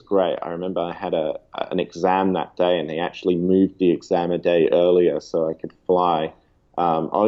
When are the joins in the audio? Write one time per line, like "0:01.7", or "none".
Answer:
none